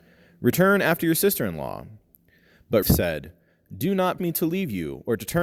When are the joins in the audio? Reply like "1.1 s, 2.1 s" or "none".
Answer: 2.8 s, 4.2 s